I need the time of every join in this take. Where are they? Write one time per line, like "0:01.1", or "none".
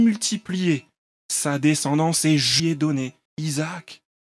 0:02.6
0:03.3

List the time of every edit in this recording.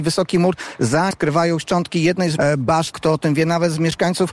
0:01.1
0:01.6
0:02.4
0:02.9

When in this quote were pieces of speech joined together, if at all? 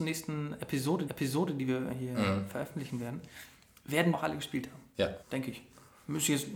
0:01.1
0:04.1
0:05.2

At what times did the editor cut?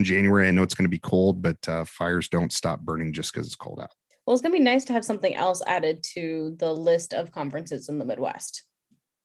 0:04.1

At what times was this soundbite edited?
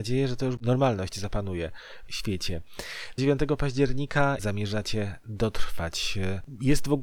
0:02.1
0:03.2
0:04.4

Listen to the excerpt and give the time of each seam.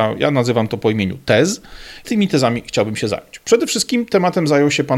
0:02.0

